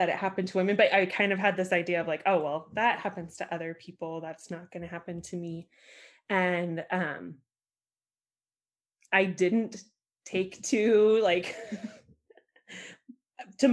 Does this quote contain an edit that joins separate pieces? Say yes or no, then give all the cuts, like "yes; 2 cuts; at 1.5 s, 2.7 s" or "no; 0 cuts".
no; 0 cuts